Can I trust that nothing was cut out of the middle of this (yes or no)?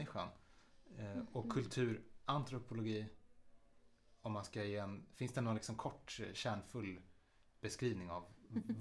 yes